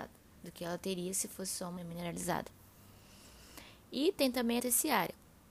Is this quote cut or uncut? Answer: cut